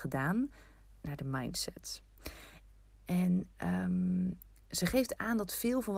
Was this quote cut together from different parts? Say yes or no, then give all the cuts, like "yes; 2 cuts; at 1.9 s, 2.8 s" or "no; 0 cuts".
no; 0 cuts